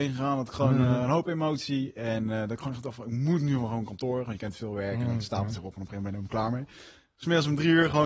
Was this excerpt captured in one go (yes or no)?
yes